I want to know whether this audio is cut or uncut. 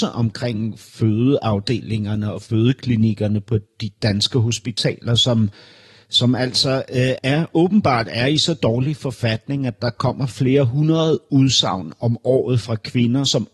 cut